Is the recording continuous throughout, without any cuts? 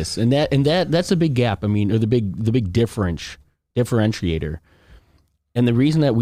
yes; 0 cuts

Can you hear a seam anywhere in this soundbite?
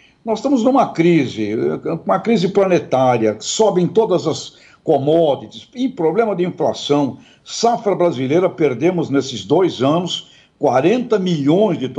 no; 0 cuts

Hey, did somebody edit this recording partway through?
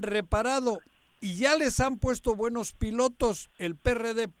no; 0 cuts

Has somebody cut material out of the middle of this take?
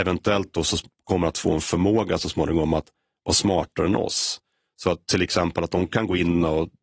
no; 0 cuts

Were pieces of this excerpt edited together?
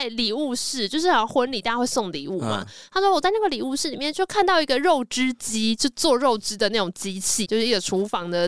yes; 1 cut; at 7.4 s

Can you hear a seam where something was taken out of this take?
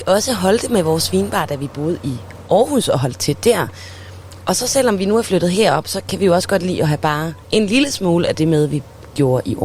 yes; 1 cut; at 7.4 s

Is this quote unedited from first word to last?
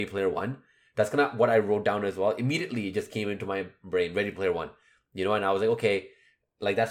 yes; 0 cuts

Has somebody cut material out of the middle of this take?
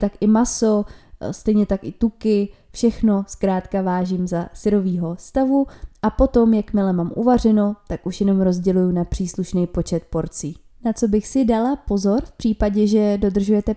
no; 0 cuts

